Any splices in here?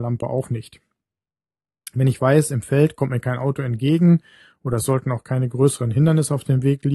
no; 0 cuts

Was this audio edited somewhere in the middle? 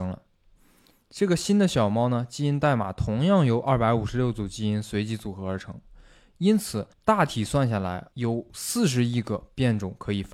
yes; 2 cuts; at 6.9 s, 8.1 s

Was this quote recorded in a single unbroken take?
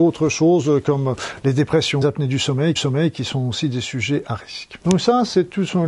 no; 3 cuts; at 2.0 s, 2.8 s, 4.8 s

